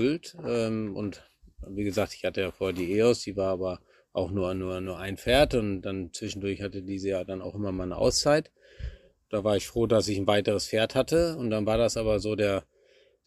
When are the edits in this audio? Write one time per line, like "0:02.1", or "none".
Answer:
none